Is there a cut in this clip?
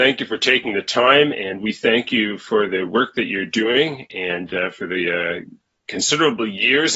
no; 0 cuts

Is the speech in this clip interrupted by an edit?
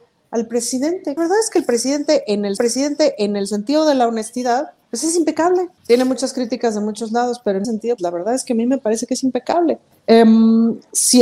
yes; 7 cuts; at 1.2 s, 2.6 s, 4.8 s, 5.8 s, 7.6 s, 8.0 s, 9.9 s

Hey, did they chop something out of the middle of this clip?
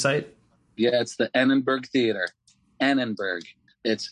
no; 0 cuts

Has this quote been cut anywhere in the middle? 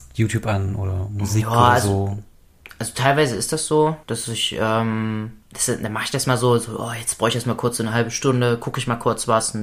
yes; 2 cuts; at 4.0 s, 5.4 s

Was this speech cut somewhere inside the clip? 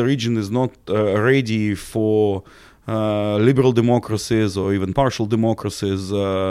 no; 0 cuts

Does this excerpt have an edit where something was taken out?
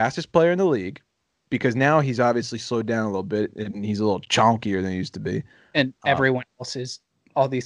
no; 0 cuts

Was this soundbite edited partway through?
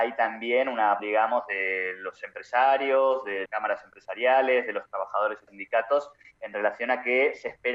yes; 3 cuts; at 1.0 s, 3.5 s, 5.5 s

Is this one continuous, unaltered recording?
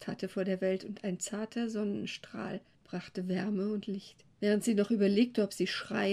no; 2 cuts; at 2.7 s, 4.3 s

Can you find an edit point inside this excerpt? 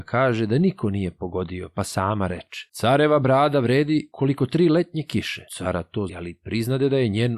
yes; 2 cuts; at 5.5 s, 6.1 s

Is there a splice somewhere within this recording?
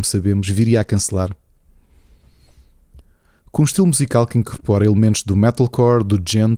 no; 0 cuts

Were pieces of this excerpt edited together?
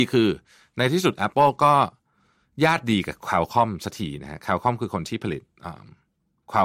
no; 0 cuts

